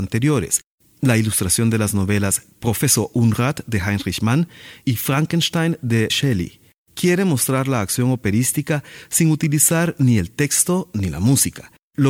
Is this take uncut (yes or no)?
no